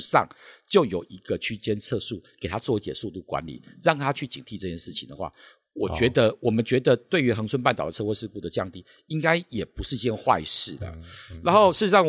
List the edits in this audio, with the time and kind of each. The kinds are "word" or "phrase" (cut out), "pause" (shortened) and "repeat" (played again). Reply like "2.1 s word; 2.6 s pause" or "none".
none